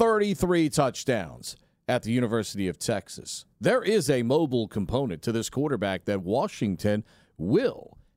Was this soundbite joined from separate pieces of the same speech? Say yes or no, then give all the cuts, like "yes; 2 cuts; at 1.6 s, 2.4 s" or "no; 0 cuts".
no; 0 cuts